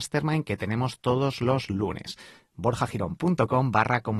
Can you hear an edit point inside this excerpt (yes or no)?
no